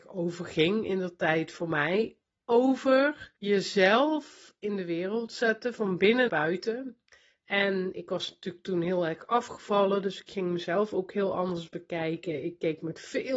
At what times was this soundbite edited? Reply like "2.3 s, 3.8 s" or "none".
3.4 s, 6.3 s